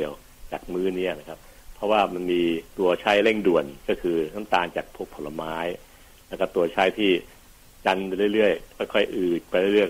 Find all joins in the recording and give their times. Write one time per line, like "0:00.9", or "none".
0:02.7

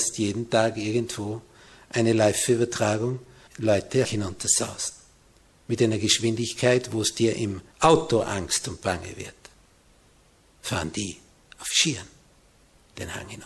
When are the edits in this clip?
0:03.5
0:04.0
0:07.7

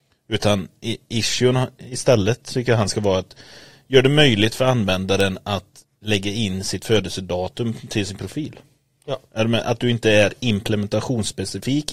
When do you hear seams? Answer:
none

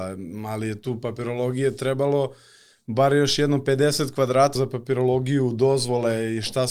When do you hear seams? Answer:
0:04.5

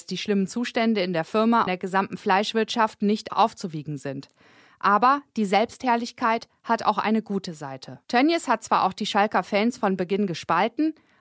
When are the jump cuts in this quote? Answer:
0:01.7
0:03.3
0:08.0

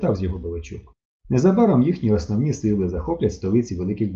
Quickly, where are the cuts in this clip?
0:01.1

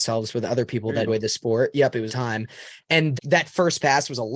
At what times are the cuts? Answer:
0:01.1
0:02.1
0:03.2

